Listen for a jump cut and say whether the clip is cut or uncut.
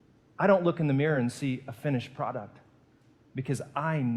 uncut